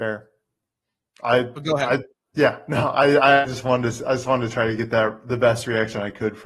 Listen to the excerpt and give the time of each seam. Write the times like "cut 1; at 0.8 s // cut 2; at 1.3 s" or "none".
none